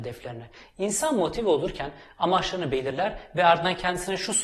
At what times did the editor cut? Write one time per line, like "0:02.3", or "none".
none